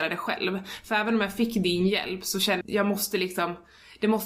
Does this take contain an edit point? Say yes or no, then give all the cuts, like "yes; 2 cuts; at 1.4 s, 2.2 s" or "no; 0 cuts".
yes; 1 cut; at 2.6 s